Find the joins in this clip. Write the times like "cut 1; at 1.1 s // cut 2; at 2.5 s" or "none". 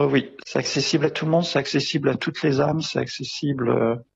none